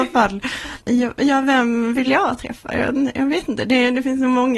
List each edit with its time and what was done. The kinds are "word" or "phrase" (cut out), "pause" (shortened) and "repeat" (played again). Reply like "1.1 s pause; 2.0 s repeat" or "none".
none